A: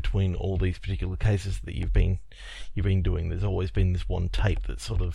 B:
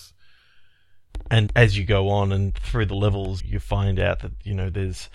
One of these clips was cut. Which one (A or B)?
B